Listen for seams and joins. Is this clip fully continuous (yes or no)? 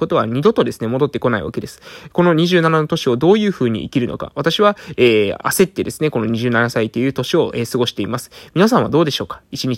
yes